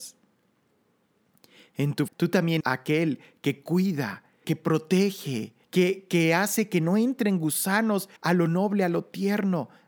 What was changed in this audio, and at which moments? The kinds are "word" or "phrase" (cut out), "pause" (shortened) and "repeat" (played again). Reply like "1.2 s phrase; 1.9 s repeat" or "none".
2.1 s word; 2.6 s word; 4.4 s word; 5.6 s pause; 8.2 s pause